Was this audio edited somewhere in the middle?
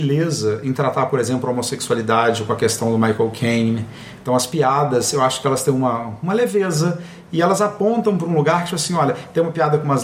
no; 0 cuts

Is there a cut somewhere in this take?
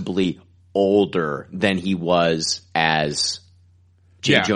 no; 0 cuts

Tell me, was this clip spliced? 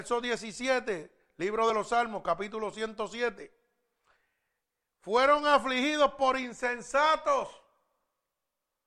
no; 0 cuts

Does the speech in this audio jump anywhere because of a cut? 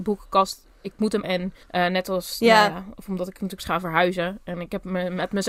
yes; 3 cuts; at 1.2 s, 1.6 s, 3.6 s

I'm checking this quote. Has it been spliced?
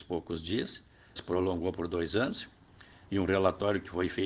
yes; 1 cut; at 1.2 s

